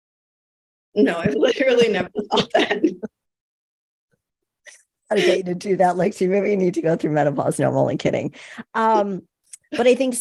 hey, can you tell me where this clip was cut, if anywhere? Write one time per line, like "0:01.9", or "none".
none